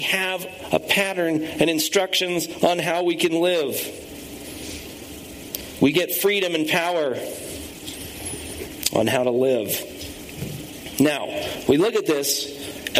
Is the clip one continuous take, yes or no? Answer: yes